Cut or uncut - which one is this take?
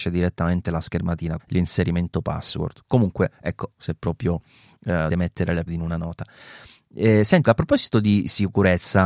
cut